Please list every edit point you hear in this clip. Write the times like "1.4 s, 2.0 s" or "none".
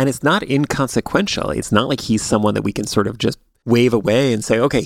none

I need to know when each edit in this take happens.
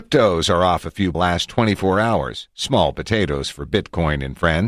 1.1 s

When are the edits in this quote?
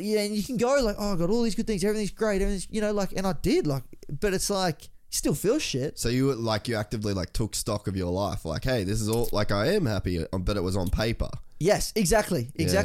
none

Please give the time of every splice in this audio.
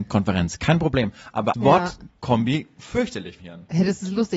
1.5 s, 3.4 s

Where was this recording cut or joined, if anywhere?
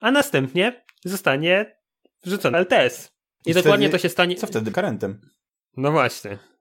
2.5 s, 4.7 s

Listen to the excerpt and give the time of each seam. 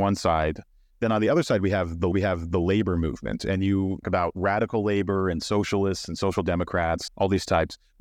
2.1 s, 4.0 s, 7.1 s

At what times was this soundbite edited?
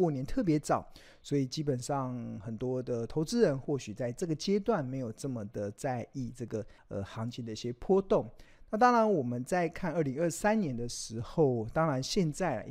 6.8 s

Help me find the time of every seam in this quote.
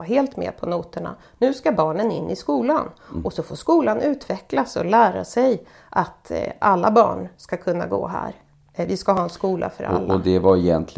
none

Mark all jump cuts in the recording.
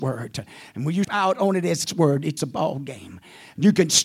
1.0 s, 1.9 s, 2.4 s

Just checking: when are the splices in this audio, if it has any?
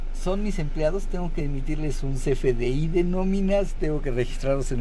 none

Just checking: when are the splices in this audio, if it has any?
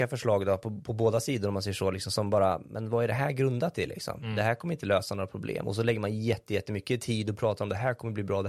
none

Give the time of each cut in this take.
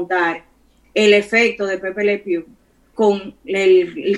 2.9 s

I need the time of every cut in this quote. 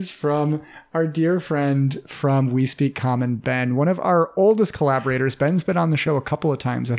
none

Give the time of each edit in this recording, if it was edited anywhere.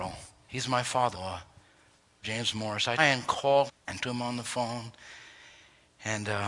1.1 s, 2.2 s, 3.0 s, 3.7 s, 4.0 s

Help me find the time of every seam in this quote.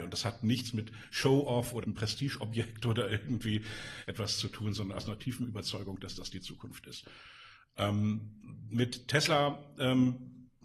1.8 s

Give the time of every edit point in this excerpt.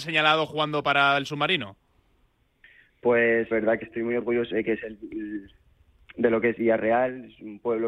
3.5 s, 3.8 s, 4.5 s, 6.6 s

